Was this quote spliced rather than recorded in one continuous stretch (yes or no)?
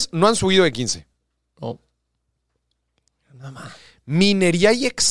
no